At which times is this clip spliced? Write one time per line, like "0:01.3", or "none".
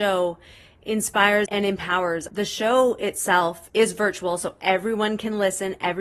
0:01.5
0:02.3
0:03.7